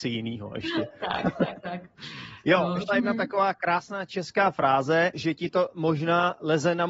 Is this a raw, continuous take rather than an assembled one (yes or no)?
no